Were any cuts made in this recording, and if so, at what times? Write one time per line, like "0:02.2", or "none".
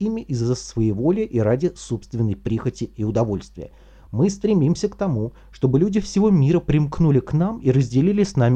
none